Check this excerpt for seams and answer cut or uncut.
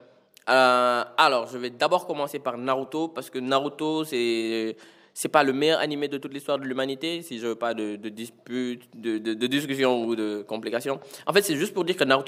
uncut